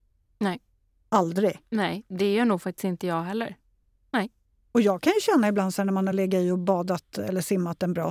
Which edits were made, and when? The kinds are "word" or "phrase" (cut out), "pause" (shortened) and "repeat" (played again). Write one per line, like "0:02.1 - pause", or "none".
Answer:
none